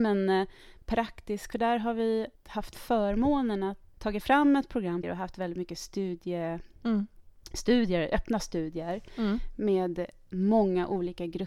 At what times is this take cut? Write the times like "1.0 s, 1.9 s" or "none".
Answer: 1.5 s, 2.4 s, 3.9 s, 5.0 s